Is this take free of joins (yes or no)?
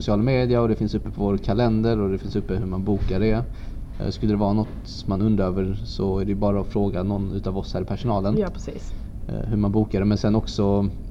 yes